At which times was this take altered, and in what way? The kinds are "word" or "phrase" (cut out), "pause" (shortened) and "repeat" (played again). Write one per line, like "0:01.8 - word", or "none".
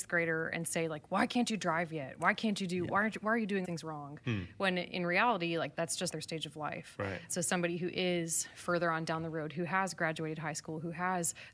0:03.6 - phrase
0:06.1 - word